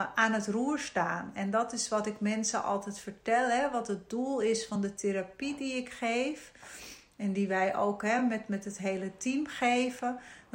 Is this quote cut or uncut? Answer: uncut